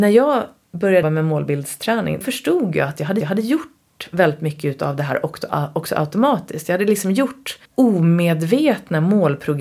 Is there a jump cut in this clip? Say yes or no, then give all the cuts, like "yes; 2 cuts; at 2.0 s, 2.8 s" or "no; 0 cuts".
yes; 4 cuts; at 1.0 s, 2.2 s, 3.2 s, 7.7 s